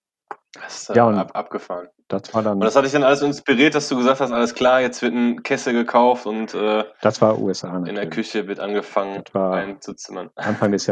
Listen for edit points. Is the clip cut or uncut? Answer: uncut